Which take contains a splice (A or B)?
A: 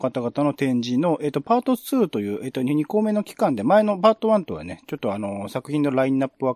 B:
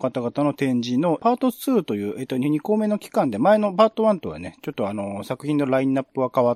B